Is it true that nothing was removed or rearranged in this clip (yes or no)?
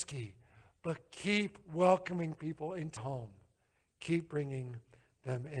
no